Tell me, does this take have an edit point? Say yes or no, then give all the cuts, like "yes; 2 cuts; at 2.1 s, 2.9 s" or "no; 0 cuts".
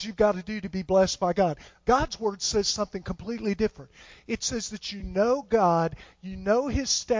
no; 0 cuts